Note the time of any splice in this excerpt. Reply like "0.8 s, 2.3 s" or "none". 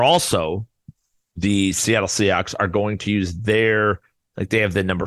none